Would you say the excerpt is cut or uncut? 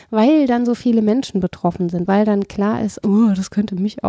cut